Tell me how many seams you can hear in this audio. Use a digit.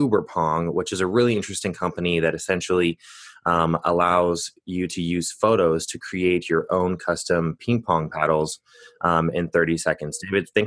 0